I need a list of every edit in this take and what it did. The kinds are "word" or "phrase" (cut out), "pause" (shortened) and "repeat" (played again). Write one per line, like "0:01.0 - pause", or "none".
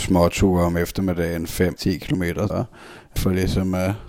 0:01.8 - word
0:02.5 - word
0:03.2 - word